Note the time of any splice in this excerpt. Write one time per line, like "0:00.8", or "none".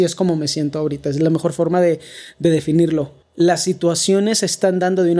0:03.2